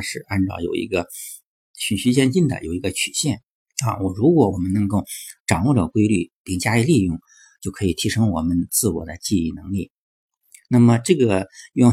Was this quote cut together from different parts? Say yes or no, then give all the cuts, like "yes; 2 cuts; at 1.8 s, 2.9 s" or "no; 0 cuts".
yes; 1 cut; at 3.6 s